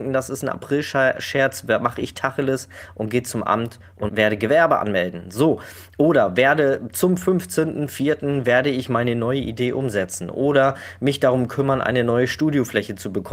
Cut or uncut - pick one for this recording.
cut